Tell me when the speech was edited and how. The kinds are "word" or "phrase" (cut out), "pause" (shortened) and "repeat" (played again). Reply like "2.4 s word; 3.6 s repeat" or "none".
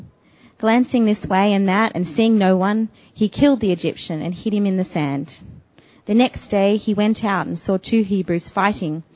none